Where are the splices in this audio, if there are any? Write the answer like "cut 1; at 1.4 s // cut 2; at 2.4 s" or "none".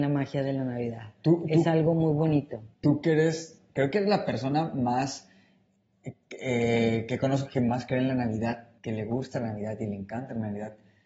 cut 1; at 2.7 s // cut 2; at 8.8 s